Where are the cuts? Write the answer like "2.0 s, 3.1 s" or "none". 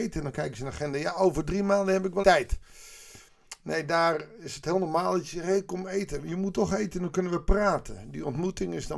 2.2 s